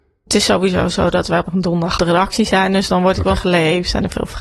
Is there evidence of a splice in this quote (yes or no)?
yes